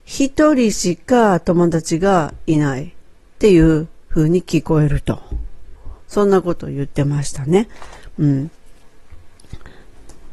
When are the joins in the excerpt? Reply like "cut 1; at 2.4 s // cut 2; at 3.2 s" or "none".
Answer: none